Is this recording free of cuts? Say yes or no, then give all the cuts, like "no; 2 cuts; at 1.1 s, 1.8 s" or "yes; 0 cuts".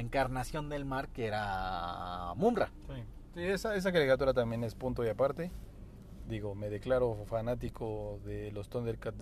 yes; 0 cuts